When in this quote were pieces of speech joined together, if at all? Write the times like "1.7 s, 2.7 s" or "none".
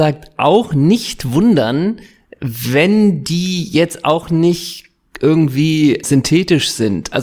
6.0 s